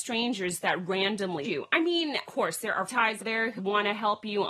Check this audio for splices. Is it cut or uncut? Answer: cut